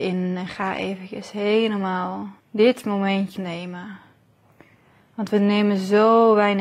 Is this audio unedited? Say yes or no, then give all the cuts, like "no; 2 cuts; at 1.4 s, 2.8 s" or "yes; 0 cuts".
no; 2 cuts; at 2.4 s, 3.4 s